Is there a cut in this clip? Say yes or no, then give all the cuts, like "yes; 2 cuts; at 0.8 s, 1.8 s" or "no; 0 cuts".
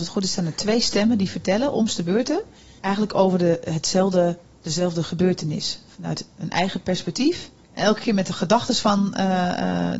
yes; 2 cuts; at 2.8 s, 7.6 s